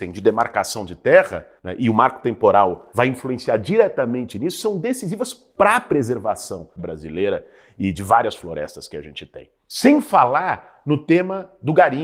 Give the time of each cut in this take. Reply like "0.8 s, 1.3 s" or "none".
6.8 s